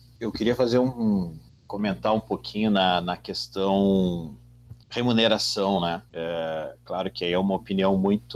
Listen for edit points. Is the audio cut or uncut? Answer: cut